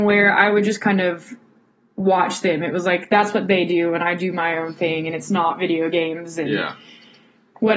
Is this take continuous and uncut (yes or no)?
yes